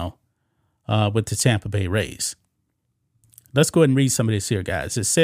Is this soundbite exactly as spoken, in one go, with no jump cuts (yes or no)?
yes